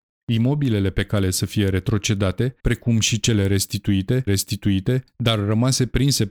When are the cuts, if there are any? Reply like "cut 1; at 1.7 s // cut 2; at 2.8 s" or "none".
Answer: cut 1; at 2.6 s // cut 2; at 4.3 s